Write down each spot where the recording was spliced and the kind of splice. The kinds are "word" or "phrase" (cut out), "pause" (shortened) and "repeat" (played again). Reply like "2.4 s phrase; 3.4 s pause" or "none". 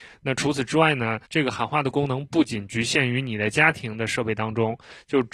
1.2 s pause